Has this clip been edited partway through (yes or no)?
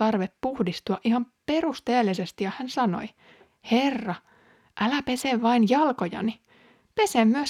no